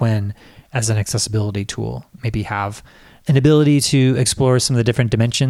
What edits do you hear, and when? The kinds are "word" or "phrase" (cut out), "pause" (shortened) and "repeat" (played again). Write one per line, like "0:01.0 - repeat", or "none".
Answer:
none